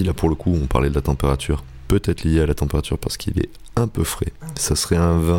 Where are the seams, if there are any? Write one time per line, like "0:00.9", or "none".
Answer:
none